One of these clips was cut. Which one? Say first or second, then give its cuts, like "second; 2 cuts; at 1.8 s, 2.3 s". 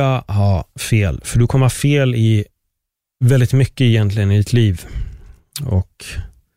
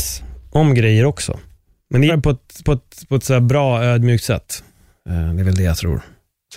second; 2 cuts; at 2.1 s, 2.6 s